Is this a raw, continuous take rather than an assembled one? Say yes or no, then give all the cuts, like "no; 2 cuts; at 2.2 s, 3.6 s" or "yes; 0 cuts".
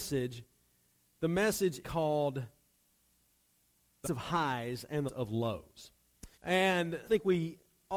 no; 5 cuts; at 1.8 s, 4.0 s, 5.1 s, 6.3 s, 7.0 s